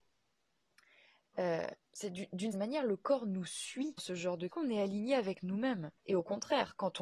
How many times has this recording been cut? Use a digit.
5